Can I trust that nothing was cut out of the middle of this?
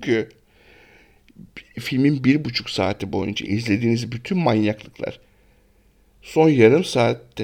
yes; 0 cuts

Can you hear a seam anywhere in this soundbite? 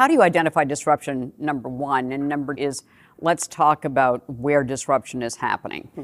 yes; 1 cut; at 2.6 s

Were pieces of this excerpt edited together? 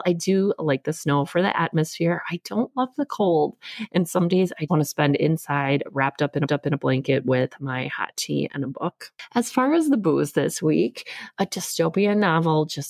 yes; 2 cuts; at 4.7 s, 6.5 s

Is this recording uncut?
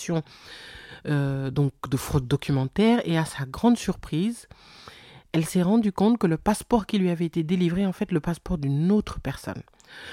yes; 0 cuts

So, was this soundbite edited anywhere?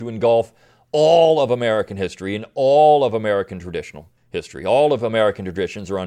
yes; 1 cut; at 4.2 s

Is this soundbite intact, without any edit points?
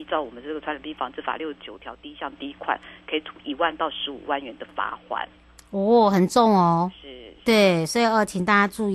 yes; 0 cuts

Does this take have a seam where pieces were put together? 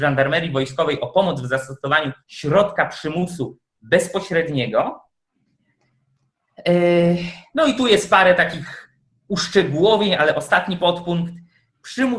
yes; 1 cut; at 2.2 s

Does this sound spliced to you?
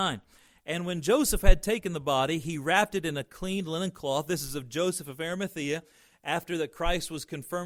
no; 0 cuts

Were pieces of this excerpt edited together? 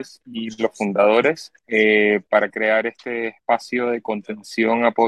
yes; 1 cut; at 1.6 s

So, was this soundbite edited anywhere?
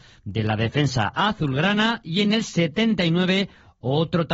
no; 0 cuts

